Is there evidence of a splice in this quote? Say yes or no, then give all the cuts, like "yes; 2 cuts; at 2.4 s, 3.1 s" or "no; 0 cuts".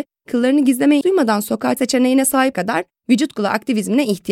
yes; 3 cuts; at 1.0 s, 1.8 s, 2.5 s